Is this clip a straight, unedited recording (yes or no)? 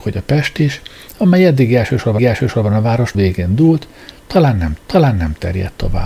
no